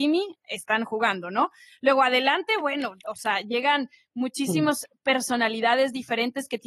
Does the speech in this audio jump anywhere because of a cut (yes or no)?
no